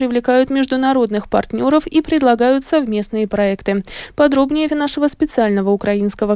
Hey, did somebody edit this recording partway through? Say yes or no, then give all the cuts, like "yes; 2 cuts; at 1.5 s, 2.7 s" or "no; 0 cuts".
yes; 1 cut; at 4.7 s